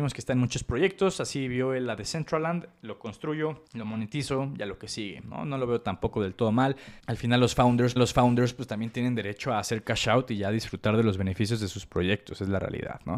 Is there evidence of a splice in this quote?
yes; 3 cuts; at 3.7 s, 7.0 s, 8.0 s

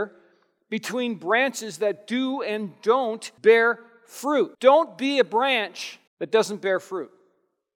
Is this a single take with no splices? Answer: no; 3 cuts; at 3.4 s, 4.5 s, 6.1 s

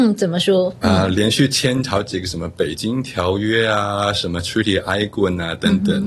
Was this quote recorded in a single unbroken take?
yes; 0 cuts

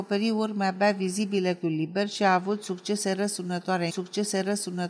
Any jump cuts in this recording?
yes; 2 cuts; at 1.6 s, 3.9 s

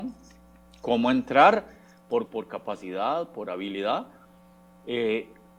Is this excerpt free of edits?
no; 1 cut; at 2.3 s

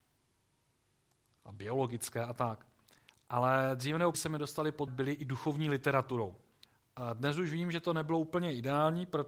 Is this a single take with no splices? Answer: no; 3 cuts; at 4.1 s, 4.9 s, 6.6 s

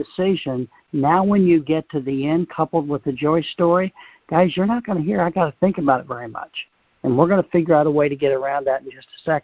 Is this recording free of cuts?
yes; 0 cuts

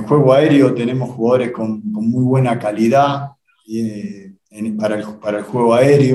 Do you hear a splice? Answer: no; 0 cuts

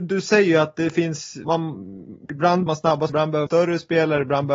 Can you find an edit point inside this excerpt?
yes; 4 cuts; at 1.5 s, 2.7 s, 3.1 s, 3.5 s

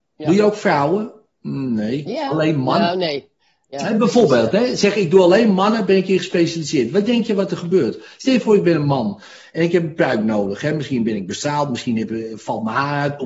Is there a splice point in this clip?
no; 0 cuts

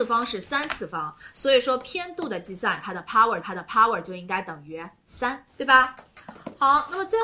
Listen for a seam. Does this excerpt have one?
yes; 2 cuts; at 3.4 s, 5.5 s

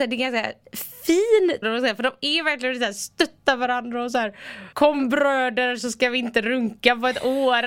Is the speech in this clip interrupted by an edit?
yes; 2 cuts; at 1.6 s, 4.7 s

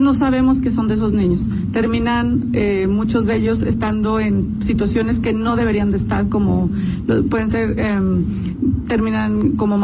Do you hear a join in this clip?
no; 0 cuts

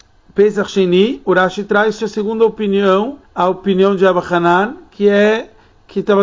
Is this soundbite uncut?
no; 2 cuts; at 2.0 s, 3.2 s

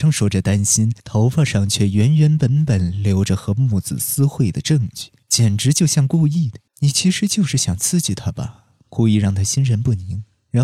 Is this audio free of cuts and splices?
no; 3 cuts; at 1.0 s, 5.2 s, 6.7 s

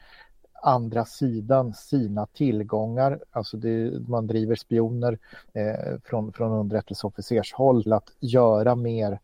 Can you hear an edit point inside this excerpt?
yes; 3 cuts; at 4.6 s, 5.5 s, 7.9 s

